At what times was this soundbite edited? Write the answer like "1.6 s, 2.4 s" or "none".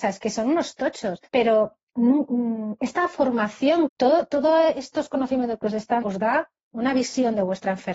1.3 s, 3.9 s, 6.0 s